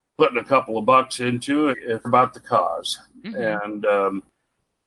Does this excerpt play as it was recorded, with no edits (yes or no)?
no